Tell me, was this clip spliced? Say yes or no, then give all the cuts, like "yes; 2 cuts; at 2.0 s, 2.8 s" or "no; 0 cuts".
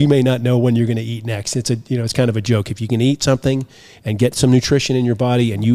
no; 0 cuts